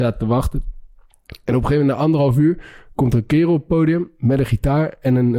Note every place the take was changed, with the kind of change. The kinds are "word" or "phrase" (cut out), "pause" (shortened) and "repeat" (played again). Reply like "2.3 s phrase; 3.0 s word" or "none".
none